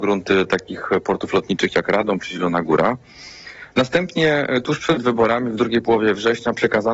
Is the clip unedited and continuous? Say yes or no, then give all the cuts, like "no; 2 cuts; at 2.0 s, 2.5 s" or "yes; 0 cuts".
yes; 0 cuts